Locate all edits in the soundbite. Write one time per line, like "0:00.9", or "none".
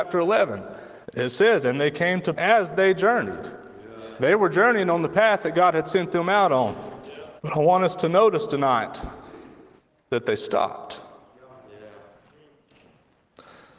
0:01.0
0:02.3
0:07.4
0:09.8